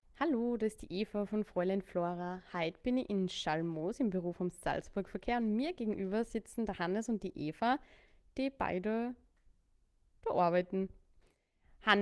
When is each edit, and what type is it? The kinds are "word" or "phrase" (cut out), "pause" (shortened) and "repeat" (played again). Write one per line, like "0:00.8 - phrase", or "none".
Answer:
none